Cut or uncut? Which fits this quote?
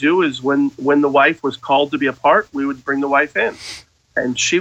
uncut